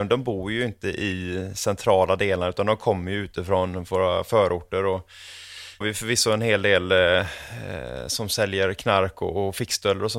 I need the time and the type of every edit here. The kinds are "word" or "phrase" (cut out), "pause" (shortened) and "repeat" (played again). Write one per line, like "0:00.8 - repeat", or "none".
0:05.8 - phrase